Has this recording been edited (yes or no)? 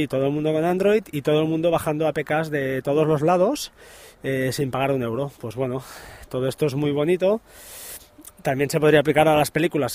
no